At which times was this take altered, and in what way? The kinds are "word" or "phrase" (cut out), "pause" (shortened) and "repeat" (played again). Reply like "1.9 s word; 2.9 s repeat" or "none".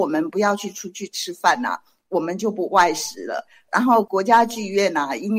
none